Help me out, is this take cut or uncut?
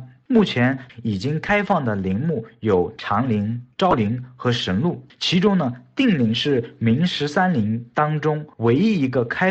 cut